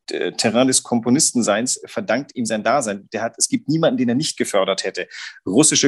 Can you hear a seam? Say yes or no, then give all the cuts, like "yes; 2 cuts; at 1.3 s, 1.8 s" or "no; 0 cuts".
no; 0 cuts